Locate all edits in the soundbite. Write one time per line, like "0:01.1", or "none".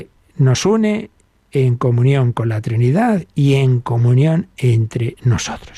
none